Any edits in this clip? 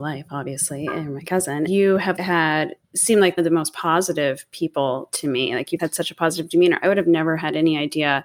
yes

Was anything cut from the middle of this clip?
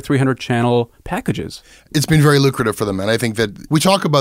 no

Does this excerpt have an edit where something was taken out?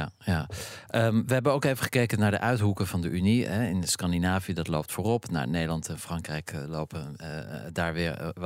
no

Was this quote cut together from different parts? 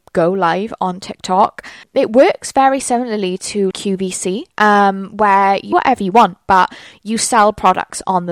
yes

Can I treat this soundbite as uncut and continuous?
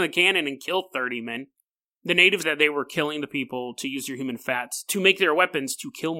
no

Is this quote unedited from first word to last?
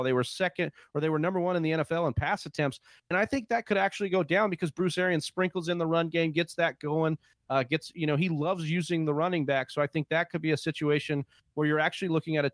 yes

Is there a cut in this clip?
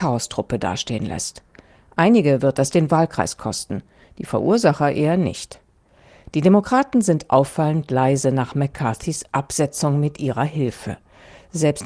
no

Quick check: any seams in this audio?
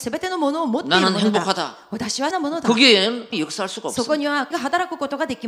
yes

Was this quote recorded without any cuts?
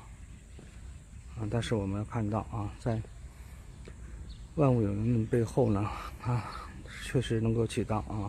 yes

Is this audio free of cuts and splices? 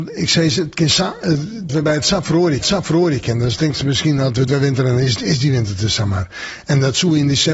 no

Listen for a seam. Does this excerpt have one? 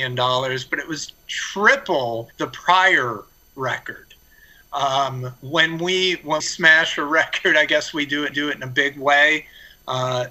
yes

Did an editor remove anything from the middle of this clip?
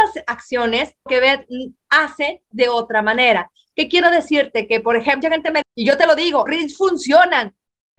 yes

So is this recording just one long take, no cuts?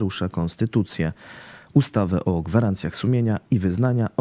yes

